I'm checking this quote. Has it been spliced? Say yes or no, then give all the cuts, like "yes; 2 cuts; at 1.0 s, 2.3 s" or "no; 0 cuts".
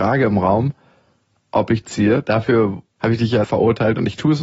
yes; 3 cuts; at 1.8 s, 2.9 s, 3.4 s